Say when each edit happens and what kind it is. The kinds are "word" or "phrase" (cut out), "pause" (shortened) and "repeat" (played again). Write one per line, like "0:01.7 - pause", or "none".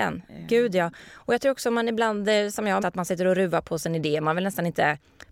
0:02.8 - word